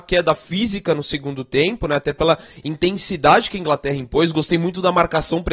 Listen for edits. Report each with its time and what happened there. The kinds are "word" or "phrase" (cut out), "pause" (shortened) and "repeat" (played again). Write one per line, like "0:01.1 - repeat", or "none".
none

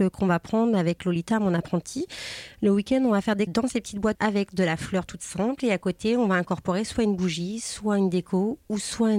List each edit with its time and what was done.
0:03.5 - word
0:04.1 - word

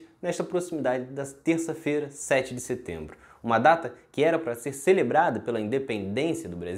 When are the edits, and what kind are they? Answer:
none

